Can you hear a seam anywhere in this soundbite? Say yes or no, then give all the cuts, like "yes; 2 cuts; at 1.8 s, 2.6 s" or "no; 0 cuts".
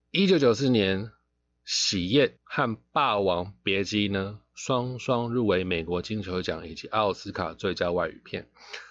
yes; 1 cut; at 2.4 s